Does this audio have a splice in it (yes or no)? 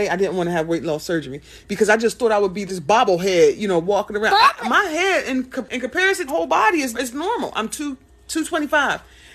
yes